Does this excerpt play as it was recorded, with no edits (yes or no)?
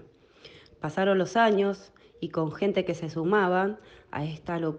yes